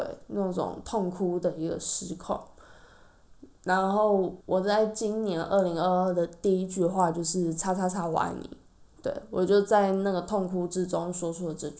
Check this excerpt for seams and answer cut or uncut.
cut